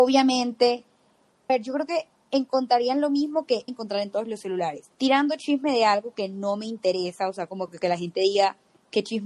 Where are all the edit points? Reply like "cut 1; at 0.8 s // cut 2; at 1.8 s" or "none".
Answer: cut 1; at 1.5 s // cut 2; at 3.7 s // cut 3; at 4.9 s